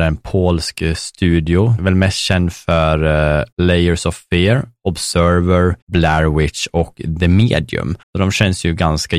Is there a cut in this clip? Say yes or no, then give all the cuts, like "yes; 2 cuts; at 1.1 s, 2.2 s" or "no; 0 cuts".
yes; 4 cuts; at 1.8 s, 3.5 s, 5.8 s, 8.0 s